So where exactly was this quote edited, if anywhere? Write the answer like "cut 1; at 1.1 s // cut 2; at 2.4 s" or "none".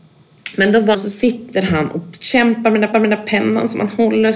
cut 1; at 0.9 s // cut 2; at 2.9 s